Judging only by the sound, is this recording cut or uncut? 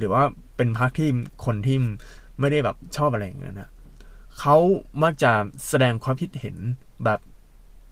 uncut